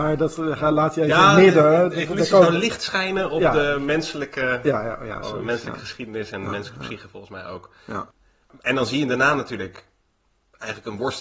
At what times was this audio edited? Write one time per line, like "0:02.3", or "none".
none